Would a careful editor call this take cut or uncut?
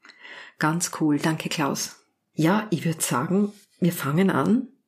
uncut